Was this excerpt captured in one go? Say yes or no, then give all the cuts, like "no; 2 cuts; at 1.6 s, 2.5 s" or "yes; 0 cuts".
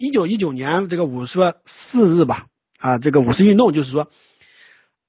yes; 0 cuts